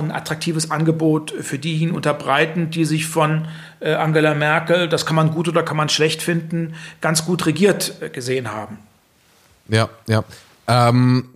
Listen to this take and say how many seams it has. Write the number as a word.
zero